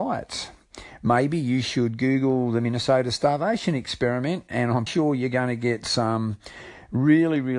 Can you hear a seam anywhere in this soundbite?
yes; 1 cut; at 4.9 s

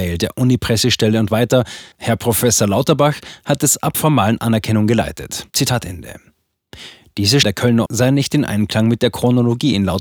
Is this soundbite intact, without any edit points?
no; 5 cuts; at 1.9 s, 3.9 s, 5.5 s, 7.4 s, 7.9 s

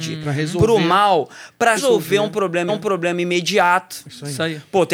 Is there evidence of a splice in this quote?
yes; 2 cuts; at 1.8 s, 2.7 s

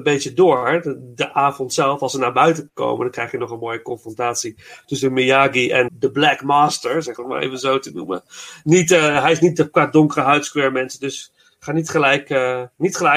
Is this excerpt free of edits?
no; 2 cuts; at 5.9 s, 7.2 s

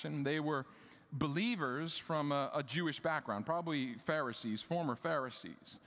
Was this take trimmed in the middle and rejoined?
no; 0 cuts

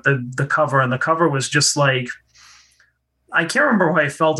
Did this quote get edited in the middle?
no; 0 cuts

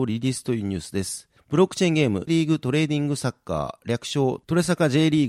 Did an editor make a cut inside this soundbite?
yes; 1 cut; at 2.3 s

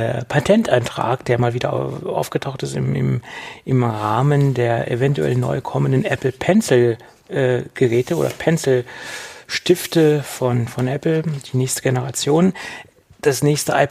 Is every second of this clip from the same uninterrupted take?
yes; 0 cuts

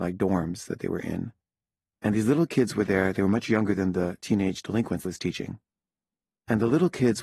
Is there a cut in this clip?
yes; 1 cut; at 5.1 s

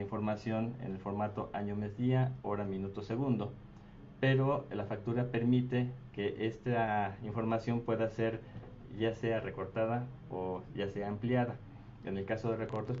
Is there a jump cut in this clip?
no; 0 cuts

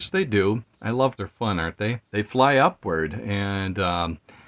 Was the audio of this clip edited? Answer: yes; 2 cuts; at 1.2 s, 2.0 s

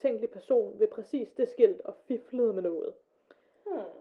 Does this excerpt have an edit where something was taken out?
no; 0 cuts

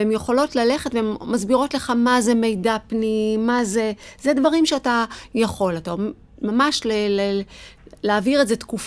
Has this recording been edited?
no; 0 cuts

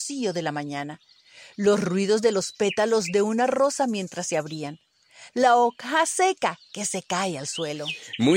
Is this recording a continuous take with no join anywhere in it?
yes; 0 cuts

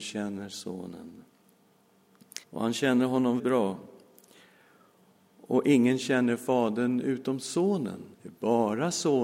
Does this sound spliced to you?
yes; 3 cuts; at 2.4 s, 3.4 s, 8.1 s

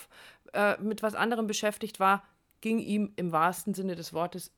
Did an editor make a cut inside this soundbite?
no; 0 cuts

